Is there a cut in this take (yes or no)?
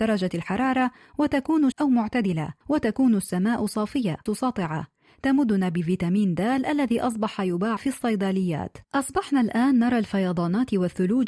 yes